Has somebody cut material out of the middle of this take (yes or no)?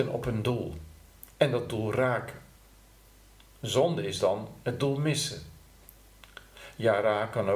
no